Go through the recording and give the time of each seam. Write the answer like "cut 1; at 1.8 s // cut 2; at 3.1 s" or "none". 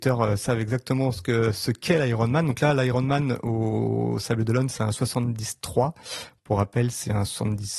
none